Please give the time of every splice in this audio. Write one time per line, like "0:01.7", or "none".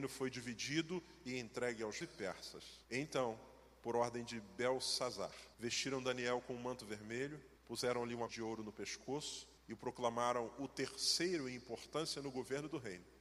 0:02.0
0:02.8
0:05.5
0:07.6
0:08.3
0:09.6